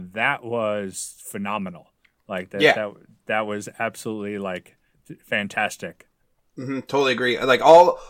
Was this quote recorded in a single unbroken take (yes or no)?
yes